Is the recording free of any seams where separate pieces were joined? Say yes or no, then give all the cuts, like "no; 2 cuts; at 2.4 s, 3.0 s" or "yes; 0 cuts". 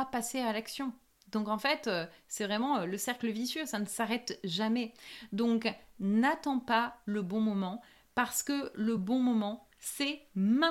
yes; 0 cuts